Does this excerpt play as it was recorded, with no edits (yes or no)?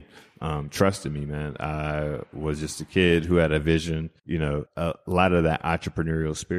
no